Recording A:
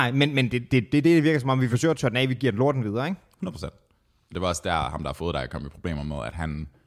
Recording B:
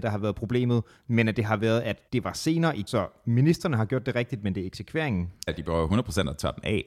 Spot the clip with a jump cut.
B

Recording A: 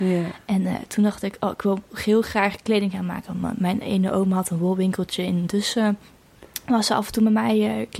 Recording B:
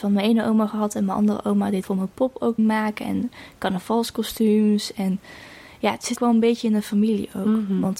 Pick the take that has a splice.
B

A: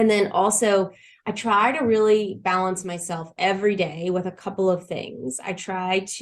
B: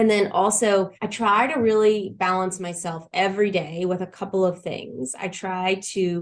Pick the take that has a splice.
B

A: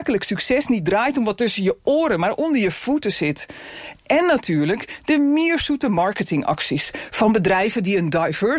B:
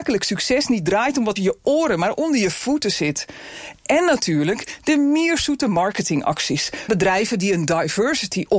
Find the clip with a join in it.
B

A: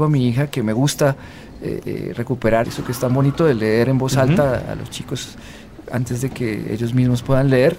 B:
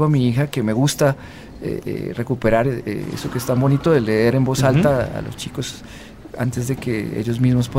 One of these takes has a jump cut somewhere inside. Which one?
A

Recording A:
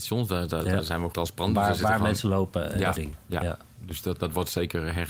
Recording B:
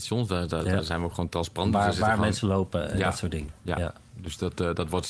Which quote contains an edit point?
A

